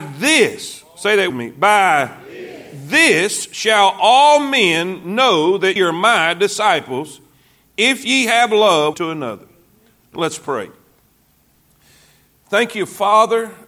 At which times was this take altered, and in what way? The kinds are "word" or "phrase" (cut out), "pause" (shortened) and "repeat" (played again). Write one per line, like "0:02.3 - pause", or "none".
0:01.3 - word
0:05.8 - word
0:08.9 - word